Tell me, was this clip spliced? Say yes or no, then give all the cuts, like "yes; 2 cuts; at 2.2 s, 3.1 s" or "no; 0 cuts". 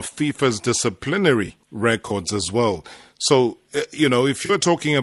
yes; 1 cut; at 1.6 s